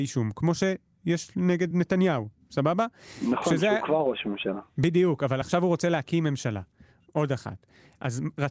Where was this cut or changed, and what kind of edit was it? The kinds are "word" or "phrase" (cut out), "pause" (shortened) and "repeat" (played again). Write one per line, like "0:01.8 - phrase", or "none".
none